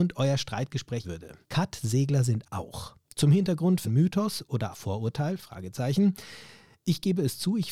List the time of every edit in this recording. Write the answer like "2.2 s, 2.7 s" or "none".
1.0 s, 1.4 s, 2.4 s, 3.0 s, 3.8 s, 4.7 s